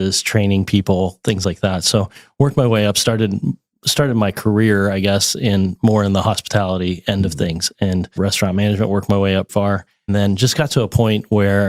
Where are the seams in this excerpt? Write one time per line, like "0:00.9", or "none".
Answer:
0:08.2
0:09.5
0:10.1